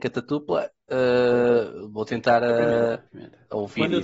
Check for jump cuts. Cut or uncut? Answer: cut